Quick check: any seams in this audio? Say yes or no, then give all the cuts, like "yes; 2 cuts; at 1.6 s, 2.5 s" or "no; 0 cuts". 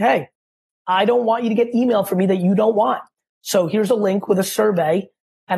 no; 0 cuts